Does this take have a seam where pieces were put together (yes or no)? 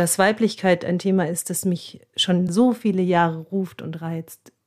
no